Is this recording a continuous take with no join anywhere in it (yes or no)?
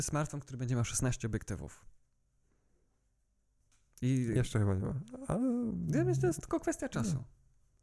yes